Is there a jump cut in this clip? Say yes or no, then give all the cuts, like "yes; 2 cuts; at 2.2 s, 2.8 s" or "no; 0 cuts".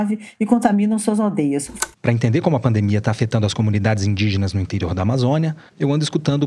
yes; 1 cut; at 1.9 s